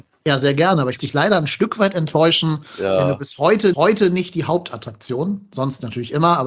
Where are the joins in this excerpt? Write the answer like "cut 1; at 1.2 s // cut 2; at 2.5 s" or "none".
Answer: cut 1; at 1.0 s // cut 2; at 3.7 s